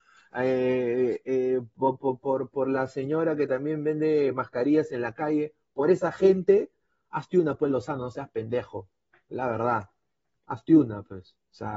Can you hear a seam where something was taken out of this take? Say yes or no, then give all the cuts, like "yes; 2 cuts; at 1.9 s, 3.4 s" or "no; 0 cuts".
no; 0 cuts